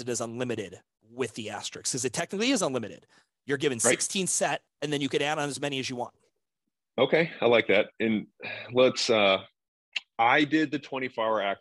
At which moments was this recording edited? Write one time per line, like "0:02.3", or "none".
none